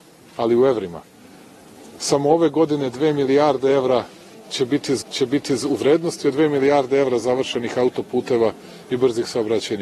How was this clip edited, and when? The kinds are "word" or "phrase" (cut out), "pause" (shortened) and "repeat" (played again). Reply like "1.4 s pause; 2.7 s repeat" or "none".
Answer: 5.0 s repeat